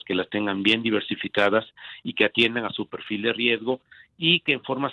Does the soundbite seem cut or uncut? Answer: uncut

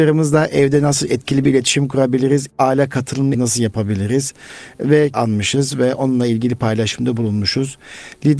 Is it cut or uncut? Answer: cut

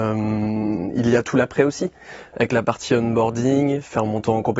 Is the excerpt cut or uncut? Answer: uncut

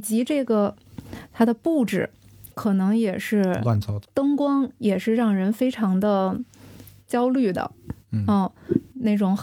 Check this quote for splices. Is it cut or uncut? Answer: cut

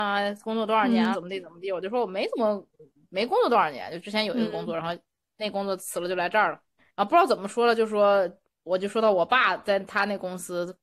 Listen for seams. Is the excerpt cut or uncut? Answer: cut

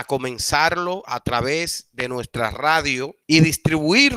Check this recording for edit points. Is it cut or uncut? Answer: cut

